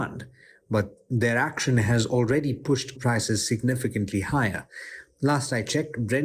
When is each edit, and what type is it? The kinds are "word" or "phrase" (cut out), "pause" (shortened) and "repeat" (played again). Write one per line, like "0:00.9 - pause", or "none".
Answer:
0:02.9 - word